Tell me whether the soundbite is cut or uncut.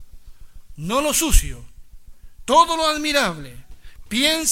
uncut